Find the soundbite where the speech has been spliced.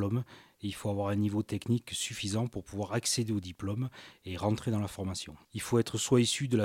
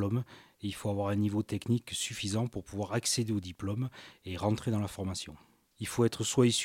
first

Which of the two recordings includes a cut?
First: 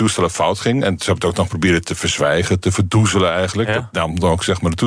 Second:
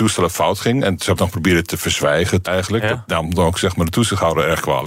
second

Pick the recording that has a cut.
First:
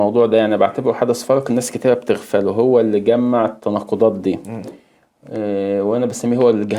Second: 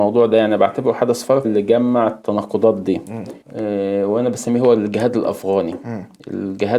second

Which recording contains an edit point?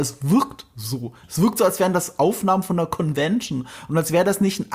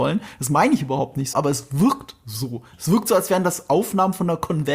second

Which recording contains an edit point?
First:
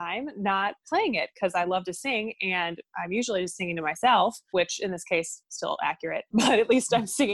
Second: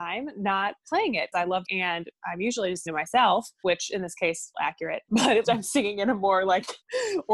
second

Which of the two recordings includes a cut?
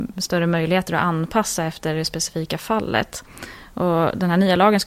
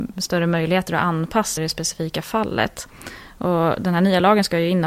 second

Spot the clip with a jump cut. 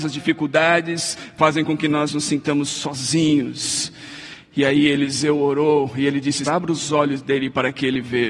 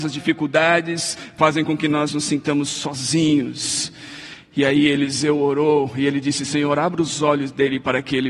first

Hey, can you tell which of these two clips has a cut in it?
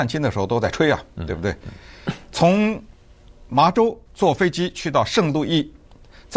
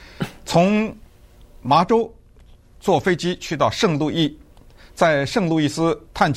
first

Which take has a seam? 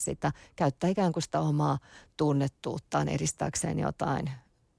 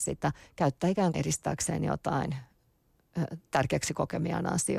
second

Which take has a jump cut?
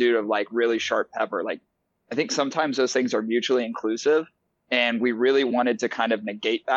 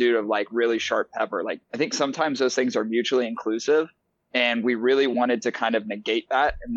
second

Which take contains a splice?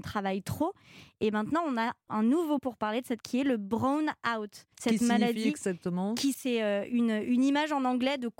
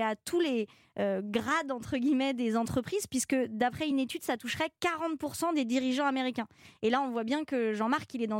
first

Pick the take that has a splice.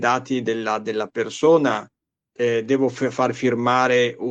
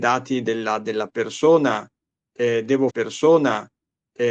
second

